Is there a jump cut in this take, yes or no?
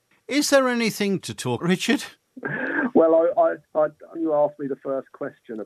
yes